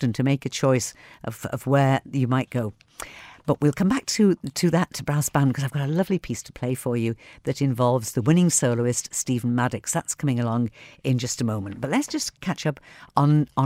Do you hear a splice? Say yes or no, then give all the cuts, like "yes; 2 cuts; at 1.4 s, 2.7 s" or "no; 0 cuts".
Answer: no; 0 cuts